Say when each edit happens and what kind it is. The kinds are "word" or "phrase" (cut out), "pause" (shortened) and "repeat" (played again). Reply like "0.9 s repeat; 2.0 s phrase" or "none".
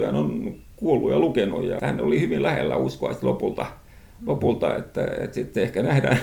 1.8 s phrase